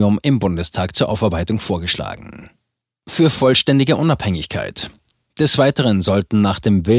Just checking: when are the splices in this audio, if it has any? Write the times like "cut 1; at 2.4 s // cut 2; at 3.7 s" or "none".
none

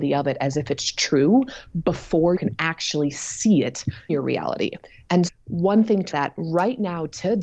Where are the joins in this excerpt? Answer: cut 1; at 2.4 s // cut 2; at 4.1 s // cut 3; at 5.3 s // cut 4; at 6.1 s

